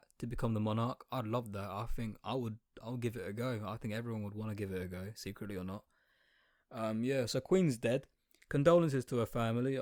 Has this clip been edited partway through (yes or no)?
no